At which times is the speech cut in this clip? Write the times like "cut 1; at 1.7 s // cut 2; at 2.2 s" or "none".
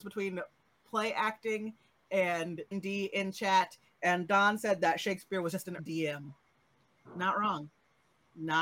cut 1; at 2.7 s // cut 2; at 5.8 s